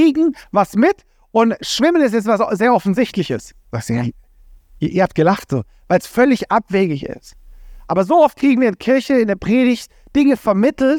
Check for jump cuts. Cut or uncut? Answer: uncut